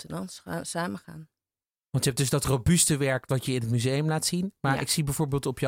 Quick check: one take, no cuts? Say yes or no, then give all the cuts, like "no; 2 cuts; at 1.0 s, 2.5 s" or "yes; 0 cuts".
yes; 0 cuts